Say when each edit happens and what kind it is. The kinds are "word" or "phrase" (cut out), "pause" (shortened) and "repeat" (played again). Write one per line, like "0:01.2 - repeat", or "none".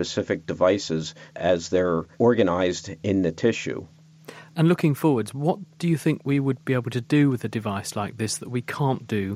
0:01.3 - pause
0:02.1 - pause